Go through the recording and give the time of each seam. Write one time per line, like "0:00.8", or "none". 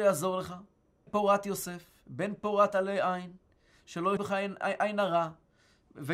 0:01.1
0:04.2
0:04.6